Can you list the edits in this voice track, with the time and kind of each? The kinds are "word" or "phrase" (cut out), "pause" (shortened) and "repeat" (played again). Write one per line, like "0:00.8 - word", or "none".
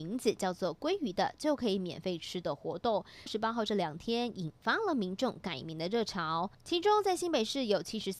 0:03.3 - phrase